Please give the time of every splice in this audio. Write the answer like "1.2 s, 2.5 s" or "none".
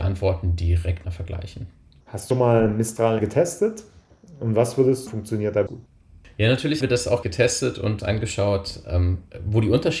1.0 s, 2.3 s, 3.2 s, 5.1 s, 5.7 s, 6.8 s, 7.2 s, 8.0 s